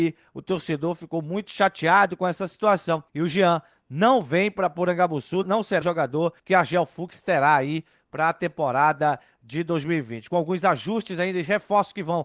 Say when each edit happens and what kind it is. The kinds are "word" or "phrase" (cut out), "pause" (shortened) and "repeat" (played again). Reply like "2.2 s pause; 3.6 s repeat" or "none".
3.1 s pause; 5.4 s word; 5.8 s word; 6.4 s pause